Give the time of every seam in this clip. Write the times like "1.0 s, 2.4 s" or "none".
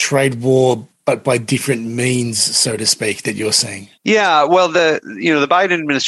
3.9 s